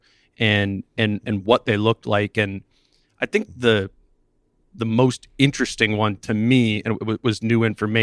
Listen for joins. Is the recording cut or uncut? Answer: uncut